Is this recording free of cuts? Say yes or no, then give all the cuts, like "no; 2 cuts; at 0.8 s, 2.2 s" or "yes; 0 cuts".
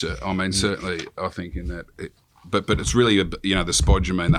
yes; 0 cuts